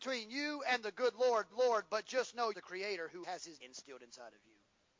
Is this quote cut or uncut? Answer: cut